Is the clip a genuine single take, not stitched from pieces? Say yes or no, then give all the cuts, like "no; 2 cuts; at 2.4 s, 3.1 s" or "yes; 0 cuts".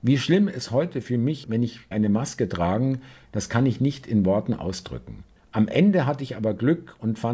no; 3 cuts; at 1.4 s, 1.9 s, 5.4 s